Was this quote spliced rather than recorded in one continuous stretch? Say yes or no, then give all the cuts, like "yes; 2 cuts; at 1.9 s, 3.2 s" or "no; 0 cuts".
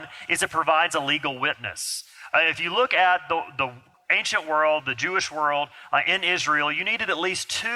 no; 0 cuts